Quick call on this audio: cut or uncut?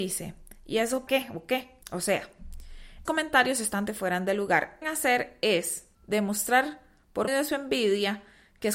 cut